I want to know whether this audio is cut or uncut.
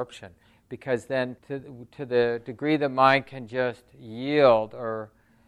cut